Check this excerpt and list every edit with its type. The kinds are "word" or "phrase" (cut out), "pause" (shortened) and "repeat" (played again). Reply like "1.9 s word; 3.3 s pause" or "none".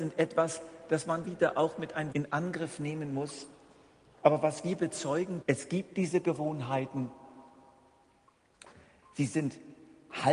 1.2 s phrase; 2.1 s phrase; 5.4 s word

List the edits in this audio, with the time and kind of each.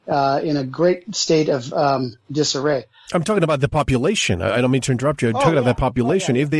none

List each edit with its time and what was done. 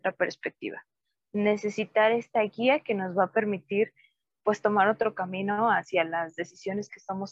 none

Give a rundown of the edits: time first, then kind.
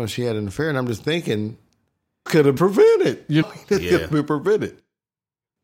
2.3 s word; 2.6 s word; 3.4 s phrase

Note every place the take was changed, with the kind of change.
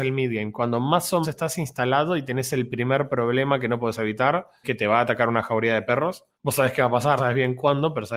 1.2 s word; 4.6 s phrase; 6.3 s pause; 7.2 s word

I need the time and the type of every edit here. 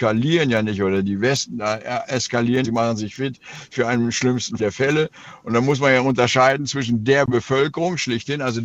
2.6 s phrase; 4.6 s word

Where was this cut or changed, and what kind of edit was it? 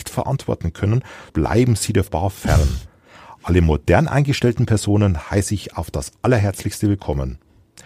1.3 s word; 2.1 s word

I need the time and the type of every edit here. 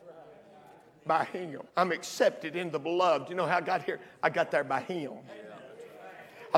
1.7 s pause

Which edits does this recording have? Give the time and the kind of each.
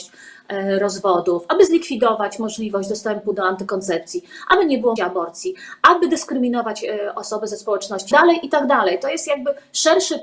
5.0 s word; 8.1 s phrase

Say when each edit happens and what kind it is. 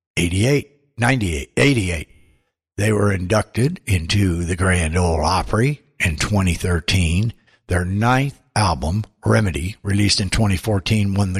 none

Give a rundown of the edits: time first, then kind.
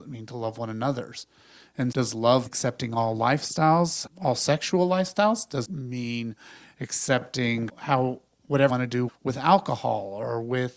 1.9 s word; 2.5 s word; 4.1 s word; 5.6 s word; 7.7 s word; 8.7 s word; 9.1 s word

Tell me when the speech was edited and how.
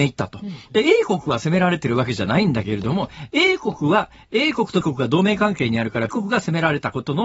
4.8 s word; 6.1 s word

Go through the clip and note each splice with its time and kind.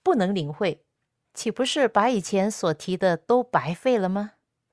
none

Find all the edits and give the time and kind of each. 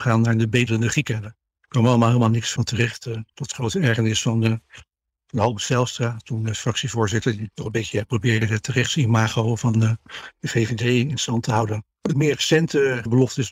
12.1 s word

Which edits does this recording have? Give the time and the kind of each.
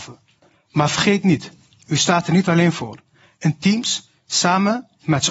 none

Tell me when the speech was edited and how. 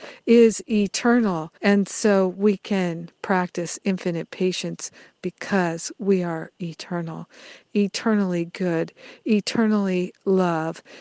1.6 s pause

